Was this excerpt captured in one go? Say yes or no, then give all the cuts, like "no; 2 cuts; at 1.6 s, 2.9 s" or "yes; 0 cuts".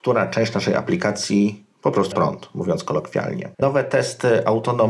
no; 2 cuts; at 2.1 s, 3.5 s